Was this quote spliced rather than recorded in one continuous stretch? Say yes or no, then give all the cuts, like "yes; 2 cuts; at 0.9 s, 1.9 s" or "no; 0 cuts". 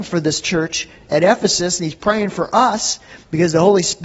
no; 0 cuts